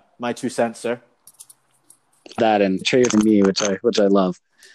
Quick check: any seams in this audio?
yes; 3 cuts; at 2.4 s, 2.8 s, 3.1 s

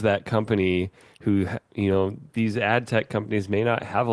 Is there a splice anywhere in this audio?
no; 0 cuts

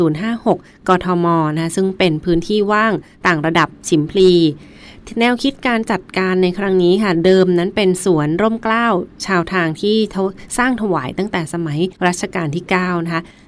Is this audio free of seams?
no; 1 cut; at 11.9 s

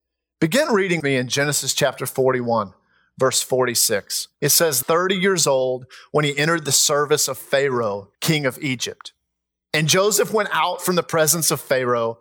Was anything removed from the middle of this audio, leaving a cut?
yes; 4 cuts; at 1.0 s, 4.3 s, 4.8 s, 8.1 s

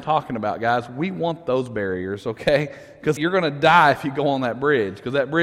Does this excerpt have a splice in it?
yes; 1 cut; at 3.2 s

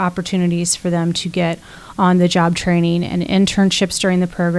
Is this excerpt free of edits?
yes; 0 cuts

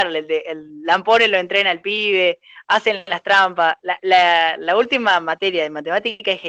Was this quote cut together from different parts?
no; 0 cuts

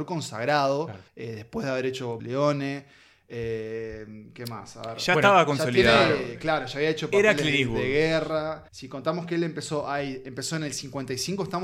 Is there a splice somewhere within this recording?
yes; 3 cuts; at 1.1 s, 2.2 s, 8.7 s

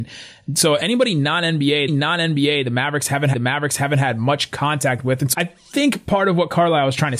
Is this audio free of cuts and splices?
no; 3 cuts; at 1.9 s, 3.3 s, 5.3 s

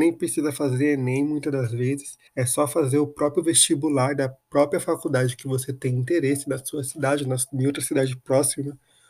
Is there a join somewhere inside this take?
yes; 2 cuts; at 2.3 s, 4.4 s

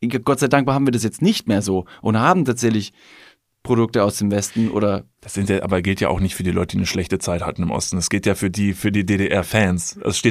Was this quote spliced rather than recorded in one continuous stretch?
no; 0 cuts

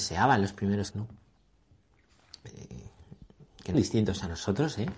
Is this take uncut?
no; 2 cuts; at 0.9 s, 3.7 s

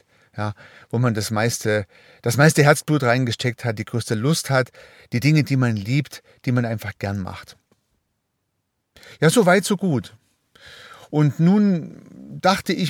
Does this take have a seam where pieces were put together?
no; 0 cuts

